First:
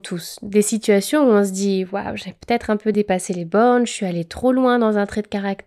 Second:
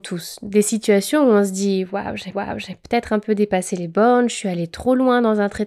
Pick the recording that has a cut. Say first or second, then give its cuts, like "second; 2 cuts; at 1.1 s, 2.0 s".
second; 1 cut; at 2.3 s